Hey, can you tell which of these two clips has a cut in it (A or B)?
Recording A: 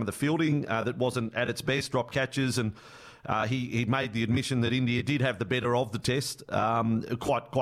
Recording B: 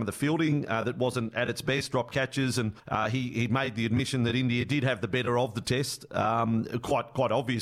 B